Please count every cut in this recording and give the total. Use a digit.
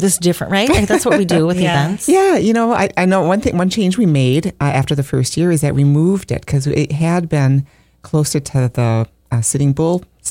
0